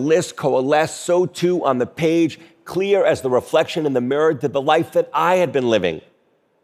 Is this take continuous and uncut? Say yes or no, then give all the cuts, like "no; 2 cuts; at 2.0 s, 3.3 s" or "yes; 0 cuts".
yes; 0 cuts